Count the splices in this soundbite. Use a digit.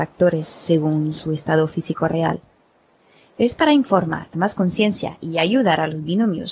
1